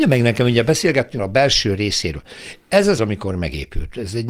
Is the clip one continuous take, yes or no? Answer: no